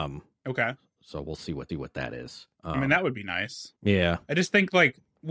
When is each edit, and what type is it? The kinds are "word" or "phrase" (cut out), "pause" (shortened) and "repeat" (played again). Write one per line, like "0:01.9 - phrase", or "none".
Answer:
0:01.7 - repeat
0:02.5 - pause
0:03.8 - pause